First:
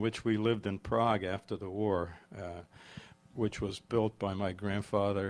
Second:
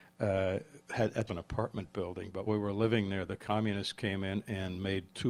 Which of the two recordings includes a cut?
second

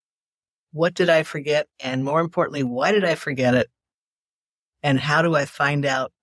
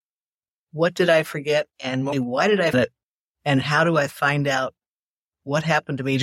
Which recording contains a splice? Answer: second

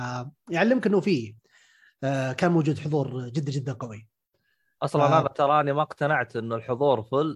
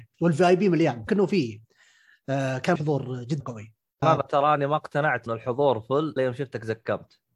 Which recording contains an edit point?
second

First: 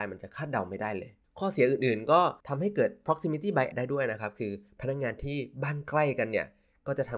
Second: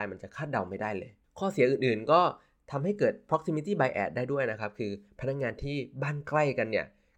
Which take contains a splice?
first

